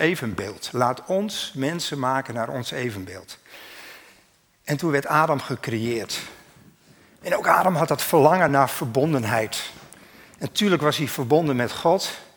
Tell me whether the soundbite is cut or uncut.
uncut